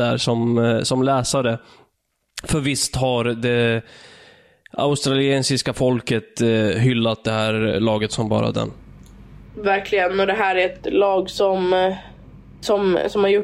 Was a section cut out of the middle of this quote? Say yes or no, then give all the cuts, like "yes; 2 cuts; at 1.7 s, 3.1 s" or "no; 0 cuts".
no; 0 cuts